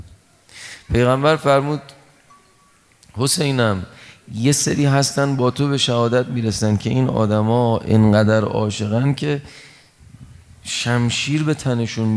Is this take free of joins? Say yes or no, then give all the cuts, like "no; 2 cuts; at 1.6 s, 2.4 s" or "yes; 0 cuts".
yes; 0 cuts